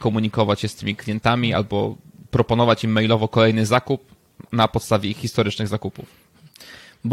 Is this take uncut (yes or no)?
yes